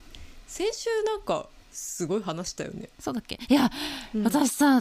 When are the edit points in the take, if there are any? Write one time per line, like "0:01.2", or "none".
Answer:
0:02.9